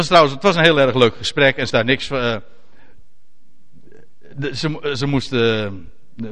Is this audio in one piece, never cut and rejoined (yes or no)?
no